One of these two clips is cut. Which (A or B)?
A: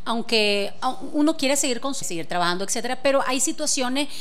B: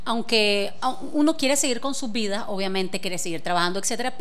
A